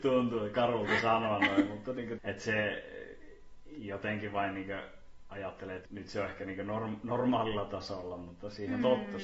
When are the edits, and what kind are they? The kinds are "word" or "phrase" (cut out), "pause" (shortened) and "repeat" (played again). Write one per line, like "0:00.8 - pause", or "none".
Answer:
0:02.2 - word
0:05.8 - word